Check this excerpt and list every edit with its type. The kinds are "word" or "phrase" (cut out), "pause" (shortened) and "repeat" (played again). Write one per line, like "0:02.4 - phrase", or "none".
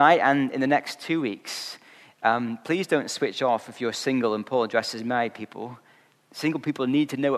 none